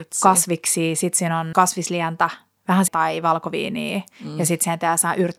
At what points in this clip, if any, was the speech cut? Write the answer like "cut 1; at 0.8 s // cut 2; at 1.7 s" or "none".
cut 1; at 1.5 s // cut 2; at 2.9 s